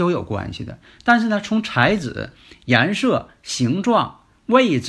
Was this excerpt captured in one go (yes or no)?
yes